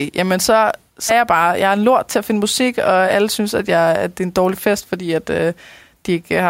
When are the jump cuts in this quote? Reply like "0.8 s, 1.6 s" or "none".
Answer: 1.1 s